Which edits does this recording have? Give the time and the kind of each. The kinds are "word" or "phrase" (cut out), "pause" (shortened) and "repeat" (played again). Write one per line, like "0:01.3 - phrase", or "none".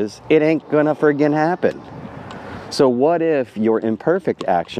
none

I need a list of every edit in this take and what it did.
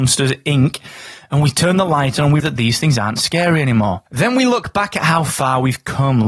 0:02.4 - word
0:04.1 - pause

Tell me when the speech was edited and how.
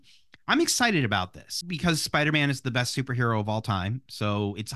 none

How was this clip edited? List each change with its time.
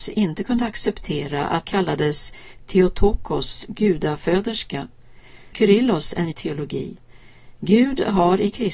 0:01.6 - word
0:05.5 - word
0:06.3 - word

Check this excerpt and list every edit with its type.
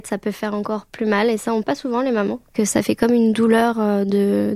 0:01.6 - word

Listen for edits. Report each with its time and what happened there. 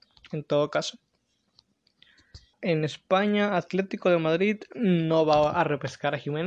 0:02.5 - pause

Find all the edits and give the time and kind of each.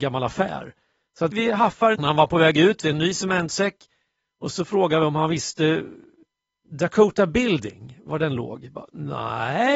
0:01.3 - word
0:01.9 - phrase
0:02.8 - phrase

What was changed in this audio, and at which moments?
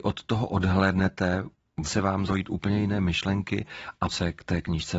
0:01.8 - word
0:02.3 - word
0:04.1 - word

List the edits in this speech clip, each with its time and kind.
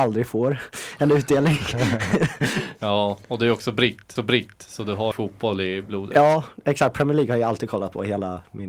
0:04.2 - repeat
0:05.1 - phrase

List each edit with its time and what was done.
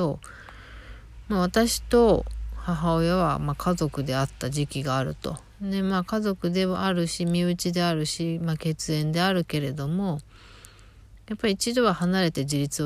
0:05.5 - pause

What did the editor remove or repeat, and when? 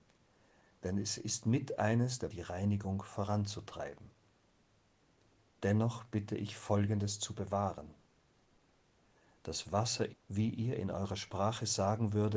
0:02.3 - phrase
0:10.1 - word

